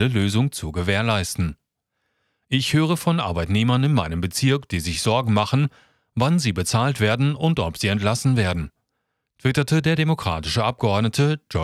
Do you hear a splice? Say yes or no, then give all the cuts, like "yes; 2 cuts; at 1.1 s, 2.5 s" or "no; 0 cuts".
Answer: no; 0 cuts